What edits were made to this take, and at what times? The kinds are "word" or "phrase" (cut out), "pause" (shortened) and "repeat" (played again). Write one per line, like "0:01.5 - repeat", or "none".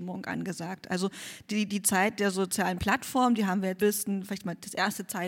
0:03.8 - phrase